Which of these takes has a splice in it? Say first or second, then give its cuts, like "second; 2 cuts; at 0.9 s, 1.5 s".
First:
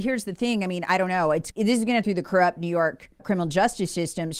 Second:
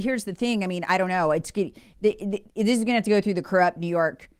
first; 3 cuts; at 1.5 s, 2.0 s, 3.2 s